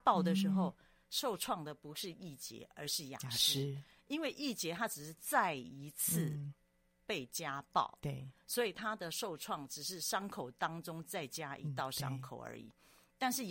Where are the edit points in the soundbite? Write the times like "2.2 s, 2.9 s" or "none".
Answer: none